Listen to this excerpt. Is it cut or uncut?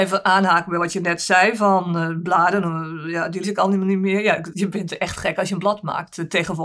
cut